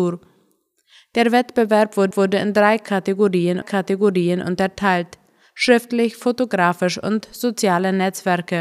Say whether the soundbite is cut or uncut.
cut